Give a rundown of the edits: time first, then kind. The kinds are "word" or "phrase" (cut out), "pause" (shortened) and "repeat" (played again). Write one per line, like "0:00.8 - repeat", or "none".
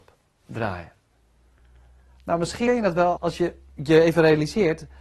0:02.7 - word
0:03.2 - word